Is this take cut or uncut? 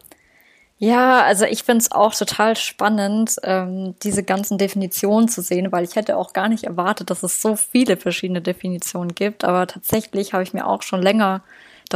uncut